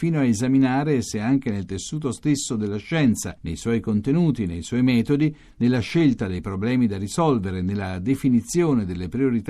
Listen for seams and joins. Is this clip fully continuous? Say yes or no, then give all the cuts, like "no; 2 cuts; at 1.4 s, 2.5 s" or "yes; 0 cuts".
yes; 0 cuts